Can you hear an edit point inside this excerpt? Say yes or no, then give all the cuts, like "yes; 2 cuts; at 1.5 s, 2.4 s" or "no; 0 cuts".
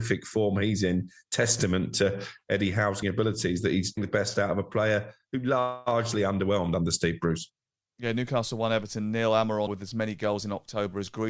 yes; 3 cuts; at 3.0 s, 4.0 s, 9.7 s